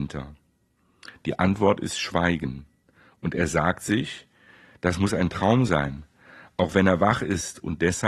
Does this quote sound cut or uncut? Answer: uncut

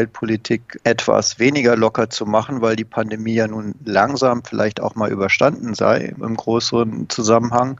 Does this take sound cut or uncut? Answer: uncut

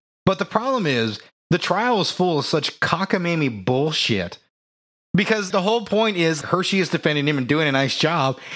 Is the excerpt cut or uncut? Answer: cut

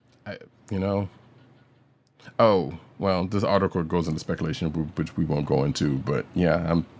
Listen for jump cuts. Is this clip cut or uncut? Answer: uncut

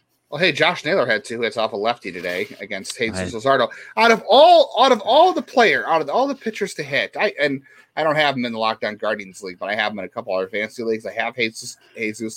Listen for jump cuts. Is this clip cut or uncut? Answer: uncut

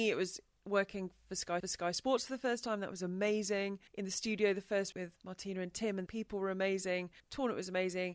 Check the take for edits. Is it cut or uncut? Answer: cut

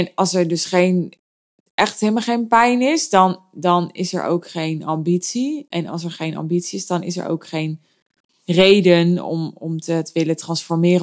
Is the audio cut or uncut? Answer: uncut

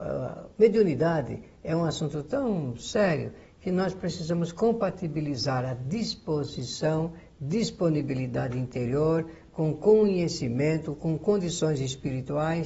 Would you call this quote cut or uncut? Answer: uncut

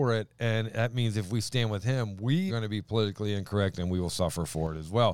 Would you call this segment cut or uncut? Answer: cut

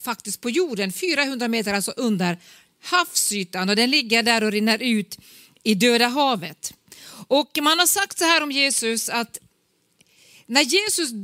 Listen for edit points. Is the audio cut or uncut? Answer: uncut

